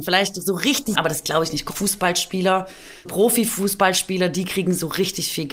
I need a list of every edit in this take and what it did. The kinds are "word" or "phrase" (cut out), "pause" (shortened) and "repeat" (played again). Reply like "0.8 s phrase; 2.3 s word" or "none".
0.9 s word; 1.7 s word; 3.1 s word